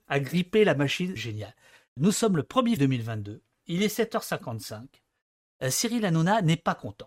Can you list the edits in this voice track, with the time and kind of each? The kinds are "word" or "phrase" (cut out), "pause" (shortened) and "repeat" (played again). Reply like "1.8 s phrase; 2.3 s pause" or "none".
1.2 s phrase; 2.8 s word

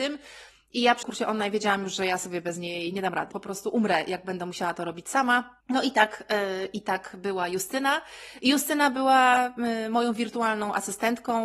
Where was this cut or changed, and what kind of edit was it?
1.0 s word; 3.3 s word; 5.6 s pause

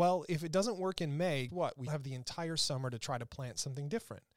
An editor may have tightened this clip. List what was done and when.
1.5 s word; 1.9 s word

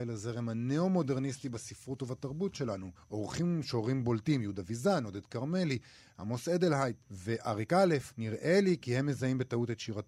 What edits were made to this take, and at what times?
3.0 s pause; 7.0 s pause; 8.1 s pause

